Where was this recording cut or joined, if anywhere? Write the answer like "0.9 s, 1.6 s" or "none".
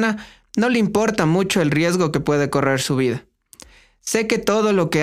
none